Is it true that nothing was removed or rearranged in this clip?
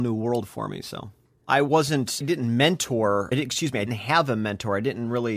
no; 3 cuts; at 2.2 s, 3.3 s, 3.9 s

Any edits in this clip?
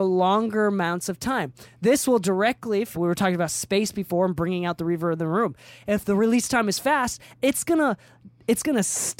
yes; 1 cut; at 2.9 s

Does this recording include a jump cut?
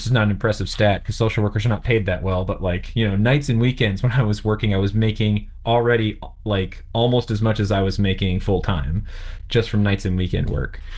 no; 0 cuts

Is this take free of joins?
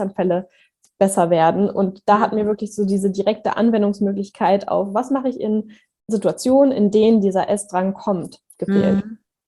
yes; 0 cuts

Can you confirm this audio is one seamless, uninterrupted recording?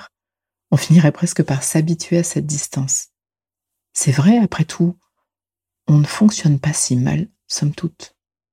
yes; 0 cuts

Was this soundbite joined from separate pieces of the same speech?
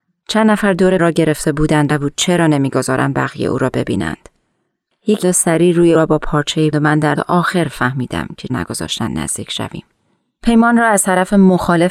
yes; 7 cuts; at 1.0 s, 1.9 s, 5.2 s, 5.9 s, 6.7 s, 7.1 s, 8.5 s

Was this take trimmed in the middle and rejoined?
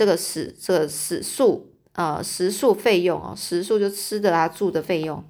no; 0 cuts

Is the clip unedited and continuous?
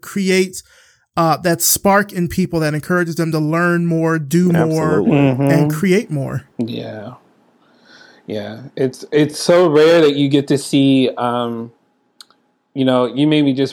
yes; 0 cuts

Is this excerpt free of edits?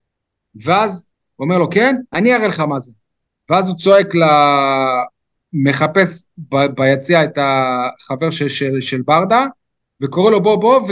yes; 0 cuts

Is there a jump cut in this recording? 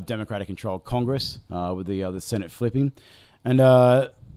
no; 0 cuts

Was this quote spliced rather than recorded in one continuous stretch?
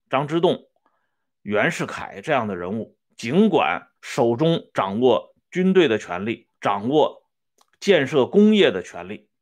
yes; 4 cuts; at 3.1 s, 4.0 s, 6.5 s, 7.5 s

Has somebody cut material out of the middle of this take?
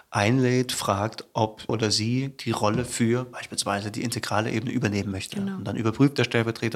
yes; 1 cut; at 1.7 s

